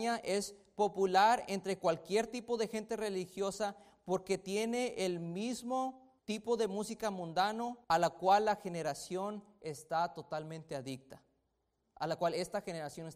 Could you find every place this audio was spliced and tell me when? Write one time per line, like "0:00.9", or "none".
0:06.2
0:07.8